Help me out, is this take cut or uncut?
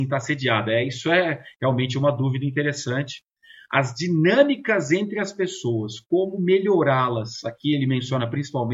uncut